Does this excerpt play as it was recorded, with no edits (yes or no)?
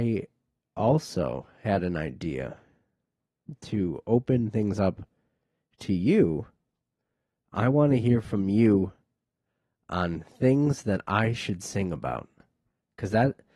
yes